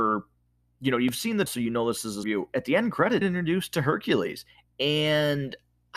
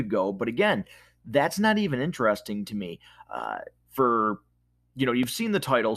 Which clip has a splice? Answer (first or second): first